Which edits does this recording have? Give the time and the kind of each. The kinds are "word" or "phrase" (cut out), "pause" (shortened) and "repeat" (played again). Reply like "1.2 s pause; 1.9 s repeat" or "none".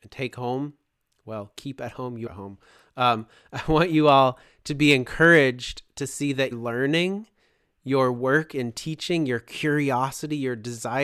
2.3 s word; 6.5 s word

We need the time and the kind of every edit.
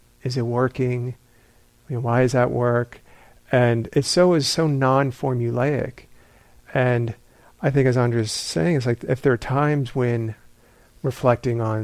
none

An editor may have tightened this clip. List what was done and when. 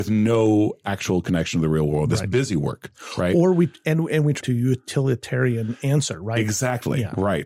4.4 s phrase

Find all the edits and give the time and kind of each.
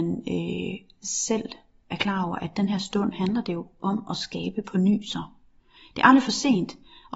none

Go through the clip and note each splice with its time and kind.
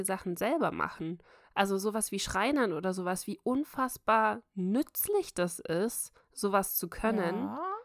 none

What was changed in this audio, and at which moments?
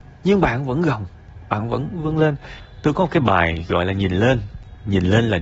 none

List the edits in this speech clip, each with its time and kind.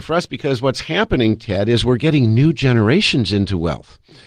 none

